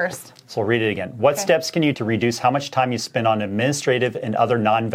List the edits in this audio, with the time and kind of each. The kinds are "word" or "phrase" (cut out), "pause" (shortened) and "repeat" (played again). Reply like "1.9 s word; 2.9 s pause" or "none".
1.9 s word